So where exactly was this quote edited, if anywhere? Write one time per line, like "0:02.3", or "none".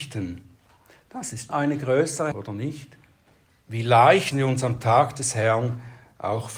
0:01.5
0:02.3
0:03.5
0:04.3